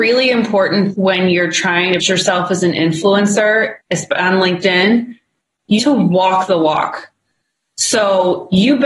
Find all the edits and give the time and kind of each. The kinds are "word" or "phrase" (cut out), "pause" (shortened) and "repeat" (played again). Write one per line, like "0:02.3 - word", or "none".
0:00.9 - word
0:02.0 - word
0:03.8 - pause
0:05.8 - word